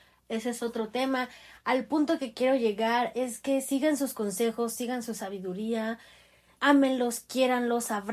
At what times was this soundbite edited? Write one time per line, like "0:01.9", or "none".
0:06.5